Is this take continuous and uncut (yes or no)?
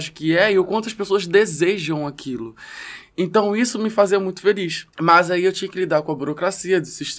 no